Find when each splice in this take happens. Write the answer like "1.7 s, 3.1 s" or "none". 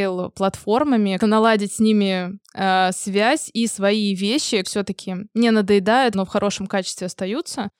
1.2 s, 4.6 s, 6.1 s